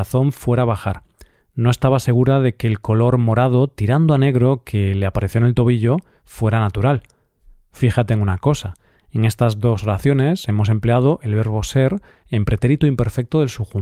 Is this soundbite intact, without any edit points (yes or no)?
yes